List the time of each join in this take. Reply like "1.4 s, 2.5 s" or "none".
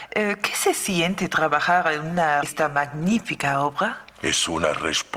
2.4 s